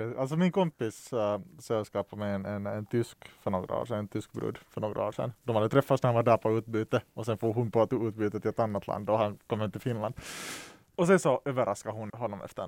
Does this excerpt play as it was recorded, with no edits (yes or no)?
yes